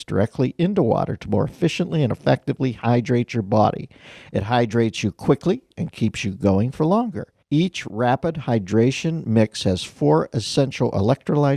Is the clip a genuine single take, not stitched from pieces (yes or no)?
no